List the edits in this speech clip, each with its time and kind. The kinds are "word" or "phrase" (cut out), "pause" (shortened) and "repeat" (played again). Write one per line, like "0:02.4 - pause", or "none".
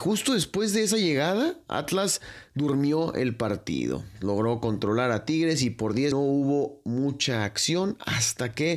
0:06.1 - phrase